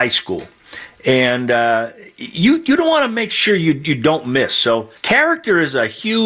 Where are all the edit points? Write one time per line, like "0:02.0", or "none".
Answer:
0:05.0

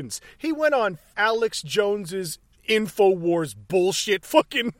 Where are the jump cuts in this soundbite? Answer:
0:01.1

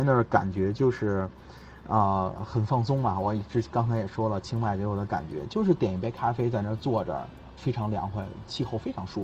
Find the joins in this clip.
0:07.6

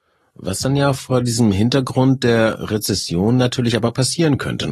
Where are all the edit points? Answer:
none

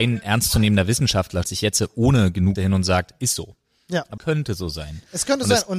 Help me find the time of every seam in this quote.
0:01.4
0:02.6
0:04.2

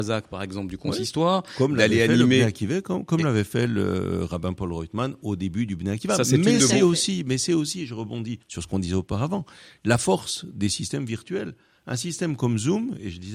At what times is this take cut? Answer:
0:08.4

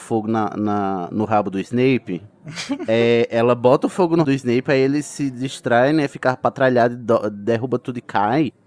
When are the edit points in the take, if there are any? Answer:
0:04.2

